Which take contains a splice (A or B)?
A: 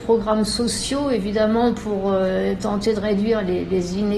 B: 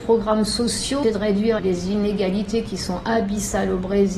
B